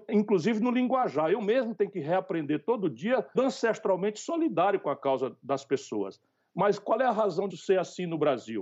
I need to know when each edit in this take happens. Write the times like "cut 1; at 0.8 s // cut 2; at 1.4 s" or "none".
cut 1; at 3.3 s // cut 2; at 7.5 s